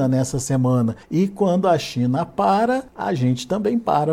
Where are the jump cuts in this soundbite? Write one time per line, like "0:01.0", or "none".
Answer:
0:01.0
0:02.9